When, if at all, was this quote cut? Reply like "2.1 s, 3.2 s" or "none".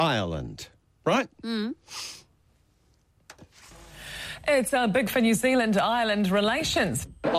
5.1 s